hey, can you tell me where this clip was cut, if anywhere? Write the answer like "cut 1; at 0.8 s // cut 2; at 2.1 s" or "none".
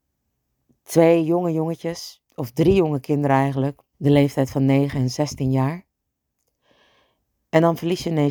cut 1; at 2.3 s // cut 2; at 3.9 s